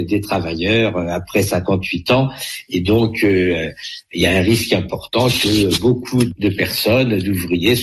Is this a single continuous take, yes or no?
yes